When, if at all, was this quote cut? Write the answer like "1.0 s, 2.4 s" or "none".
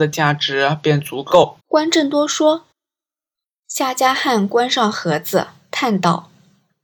1.6 s, 2.7 s